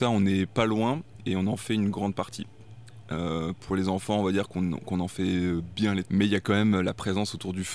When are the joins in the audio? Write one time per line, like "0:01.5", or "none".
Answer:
0:06.0